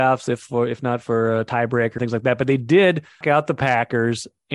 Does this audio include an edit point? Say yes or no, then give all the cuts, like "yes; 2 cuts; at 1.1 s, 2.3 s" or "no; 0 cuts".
yes; 2 cuts; at 2.0 s, 3.2 s